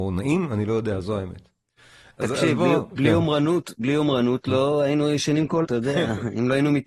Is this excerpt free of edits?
no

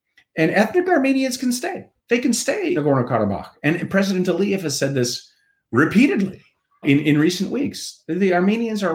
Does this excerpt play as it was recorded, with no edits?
no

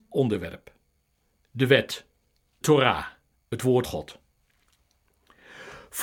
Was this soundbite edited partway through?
yes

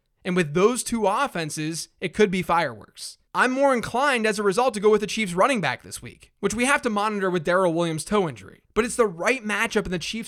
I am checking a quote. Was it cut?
yes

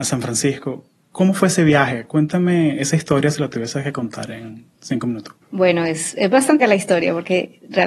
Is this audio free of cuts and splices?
no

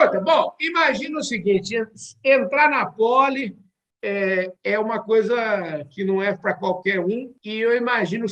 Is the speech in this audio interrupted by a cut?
yes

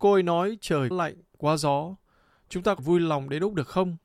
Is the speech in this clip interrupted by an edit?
yes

